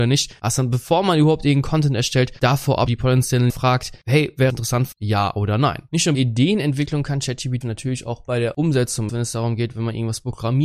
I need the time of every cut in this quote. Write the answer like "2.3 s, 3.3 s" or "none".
2.9 s, 3.5 s, 4.5 s, 4.9 s, 6.1 s, 7.6 s, 9.1 s